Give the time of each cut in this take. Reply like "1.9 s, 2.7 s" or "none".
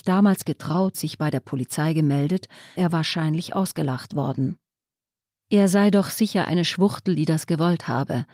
0.9 s, 2.8 s